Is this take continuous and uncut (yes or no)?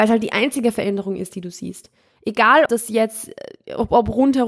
no